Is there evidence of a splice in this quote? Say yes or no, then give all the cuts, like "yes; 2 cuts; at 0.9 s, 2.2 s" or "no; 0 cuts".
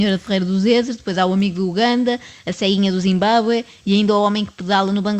no; 0 cuts